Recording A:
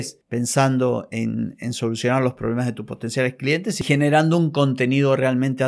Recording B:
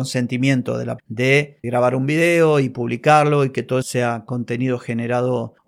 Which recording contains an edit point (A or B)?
B